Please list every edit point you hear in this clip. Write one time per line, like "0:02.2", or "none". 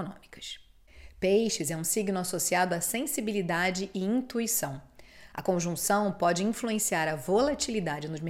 none